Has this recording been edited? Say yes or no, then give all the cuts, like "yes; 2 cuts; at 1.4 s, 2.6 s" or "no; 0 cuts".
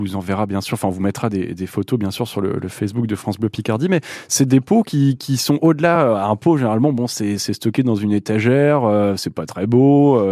no; 0 cuts